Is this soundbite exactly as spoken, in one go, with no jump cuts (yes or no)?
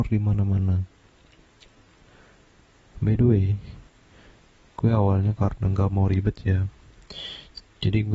yes